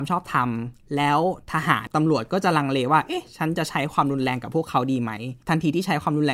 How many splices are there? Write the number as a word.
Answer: one